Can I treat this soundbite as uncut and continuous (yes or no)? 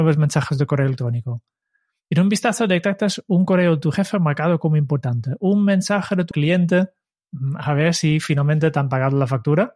no